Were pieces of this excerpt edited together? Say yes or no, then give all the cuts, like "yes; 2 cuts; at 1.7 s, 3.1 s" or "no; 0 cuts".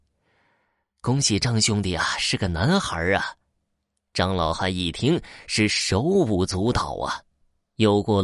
no; 0 cuts